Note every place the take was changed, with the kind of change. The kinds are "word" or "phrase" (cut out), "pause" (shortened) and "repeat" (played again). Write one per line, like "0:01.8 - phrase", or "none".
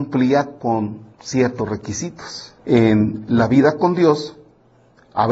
0:01.1 - pause
0:02.6 - pause